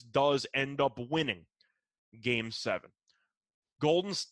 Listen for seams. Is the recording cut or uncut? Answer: uncut